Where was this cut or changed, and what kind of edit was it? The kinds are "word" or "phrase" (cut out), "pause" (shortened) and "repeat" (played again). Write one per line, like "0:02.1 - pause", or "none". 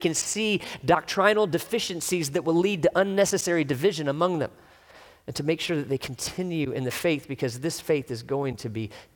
none